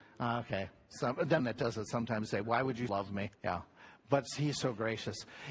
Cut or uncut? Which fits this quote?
cut